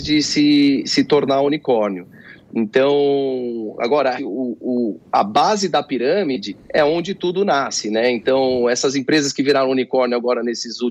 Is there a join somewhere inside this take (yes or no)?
yes